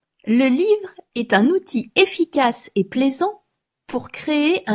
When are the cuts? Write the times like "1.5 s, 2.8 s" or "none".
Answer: none

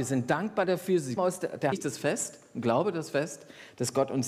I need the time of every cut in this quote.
1.2 s, 1.7 s

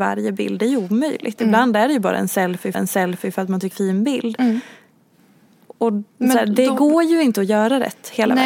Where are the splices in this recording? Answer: 2.7 s, 3.7 s, 6.1 s

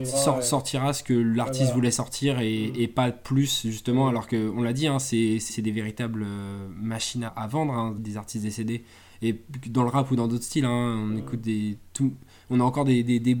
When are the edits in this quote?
5.5 s, 7.3 s, 8.0 s

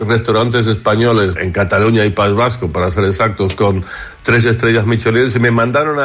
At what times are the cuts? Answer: 1.4 s

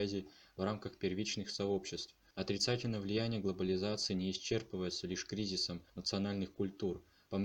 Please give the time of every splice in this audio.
2.3 s, 5.9 s

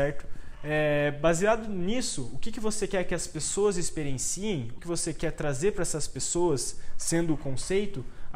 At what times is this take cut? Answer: 4.8 s

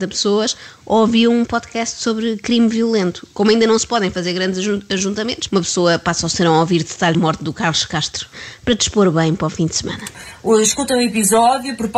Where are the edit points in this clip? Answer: 5.5 s, 7.1 s

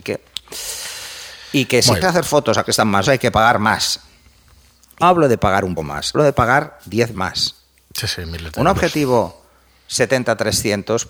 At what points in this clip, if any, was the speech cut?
2.0 s, 2.6 s, 3.0 s, 5.0 s, 5.8 s, 6.1 s, 7.1 s

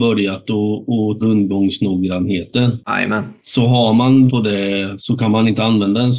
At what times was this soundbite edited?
1.2 s, 4.3 s, 5.0 s

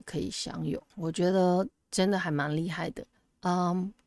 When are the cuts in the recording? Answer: 0.9 s, 3.2 s

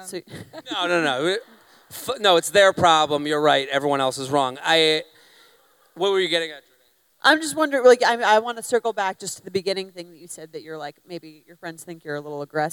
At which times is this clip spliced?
none

